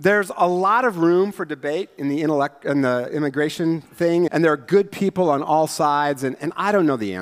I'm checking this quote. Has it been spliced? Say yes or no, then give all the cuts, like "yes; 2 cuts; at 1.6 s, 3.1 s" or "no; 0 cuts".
yes; 1 cut; at 4.3 s